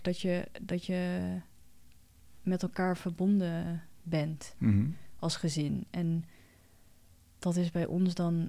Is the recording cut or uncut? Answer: uncut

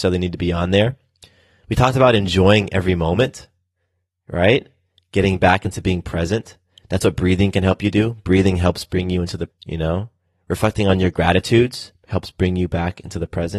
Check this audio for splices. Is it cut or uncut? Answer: cut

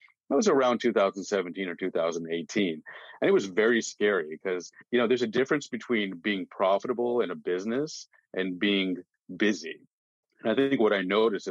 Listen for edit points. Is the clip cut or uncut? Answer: cut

